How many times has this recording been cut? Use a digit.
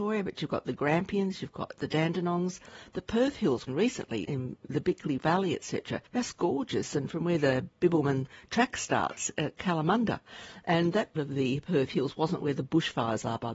5